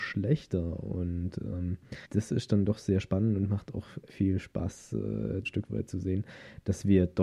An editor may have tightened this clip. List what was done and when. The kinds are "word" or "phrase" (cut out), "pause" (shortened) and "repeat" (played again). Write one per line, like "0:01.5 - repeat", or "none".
0:02.0 - pause
0:04.1 - word
0:05.4 - phrase